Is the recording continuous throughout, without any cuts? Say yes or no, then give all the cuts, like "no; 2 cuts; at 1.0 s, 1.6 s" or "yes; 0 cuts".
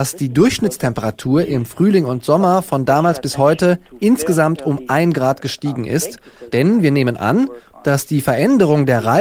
yes; 0 cuts